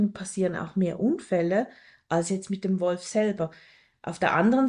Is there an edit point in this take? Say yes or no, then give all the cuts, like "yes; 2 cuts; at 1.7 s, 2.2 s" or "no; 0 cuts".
no; 0 cuts